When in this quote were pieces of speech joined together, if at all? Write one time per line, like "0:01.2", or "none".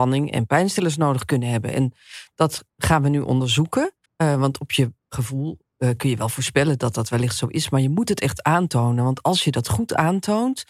0:04.0
0:05.0